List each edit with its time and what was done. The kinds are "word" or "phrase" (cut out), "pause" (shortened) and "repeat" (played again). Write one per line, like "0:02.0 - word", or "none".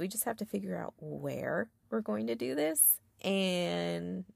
none